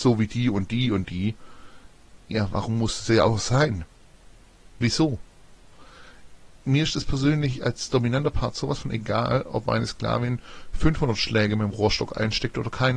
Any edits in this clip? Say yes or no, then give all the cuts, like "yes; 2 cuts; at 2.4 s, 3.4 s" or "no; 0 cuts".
yes; 2 cuts; at 2.2 s, 4.7 s